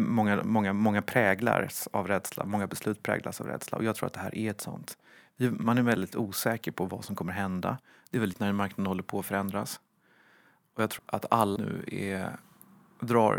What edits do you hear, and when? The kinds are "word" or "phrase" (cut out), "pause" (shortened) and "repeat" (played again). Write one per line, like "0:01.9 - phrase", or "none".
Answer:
0:08.3 - word
0:11.0 - word
0:11.6 - word